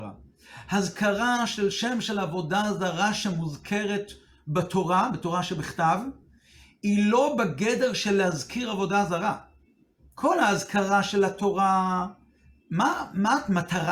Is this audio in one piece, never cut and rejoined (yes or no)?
yes